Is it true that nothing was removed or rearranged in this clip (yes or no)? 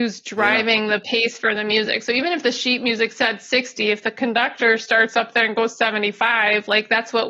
yes